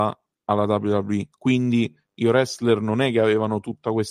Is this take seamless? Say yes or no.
no